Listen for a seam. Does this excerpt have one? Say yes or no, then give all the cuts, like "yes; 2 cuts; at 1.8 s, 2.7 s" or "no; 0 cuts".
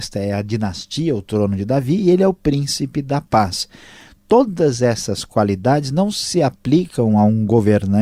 no; 0 cuts